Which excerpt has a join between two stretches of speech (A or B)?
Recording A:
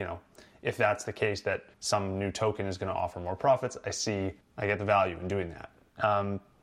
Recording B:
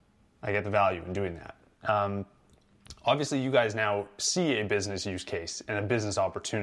A